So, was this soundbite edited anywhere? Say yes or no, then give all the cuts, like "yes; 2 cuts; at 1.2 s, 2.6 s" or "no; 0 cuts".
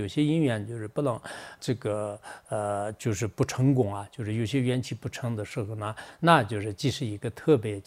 yes; 1 cut; at 1.6 s